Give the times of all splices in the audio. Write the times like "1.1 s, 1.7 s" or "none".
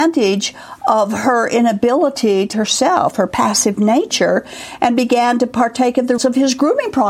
2.5 s, 6.2 s